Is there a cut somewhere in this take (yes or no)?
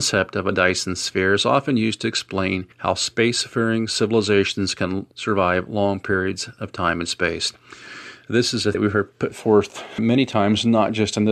yes